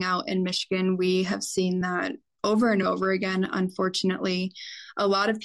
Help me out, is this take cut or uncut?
uncut